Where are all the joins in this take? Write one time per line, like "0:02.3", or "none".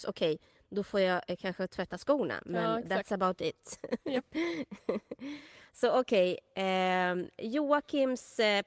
none